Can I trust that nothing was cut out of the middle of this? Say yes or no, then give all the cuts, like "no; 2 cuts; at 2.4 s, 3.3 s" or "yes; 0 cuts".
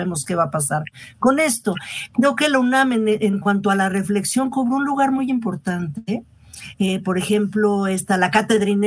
yes; 0 cuts